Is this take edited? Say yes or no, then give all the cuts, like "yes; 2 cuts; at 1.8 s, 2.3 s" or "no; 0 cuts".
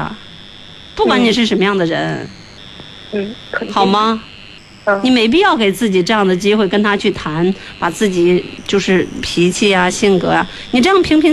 no; 0 cuts